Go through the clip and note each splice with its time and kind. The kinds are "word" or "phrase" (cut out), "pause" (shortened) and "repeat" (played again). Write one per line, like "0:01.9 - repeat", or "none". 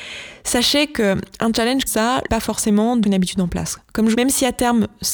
0:01.9 - word
0:02.3 - phrase
0:03.0 - word
0:04.1 - phrase